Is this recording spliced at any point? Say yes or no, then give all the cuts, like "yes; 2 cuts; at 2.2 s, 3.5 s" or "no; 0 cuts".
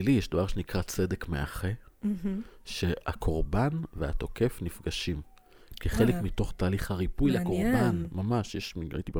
no; 0 cuts